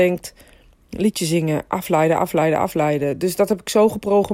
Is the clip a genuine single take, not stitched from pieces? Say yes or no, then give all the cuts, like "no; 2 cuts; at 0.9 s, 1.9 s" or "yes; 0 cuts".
yes; 0 cuts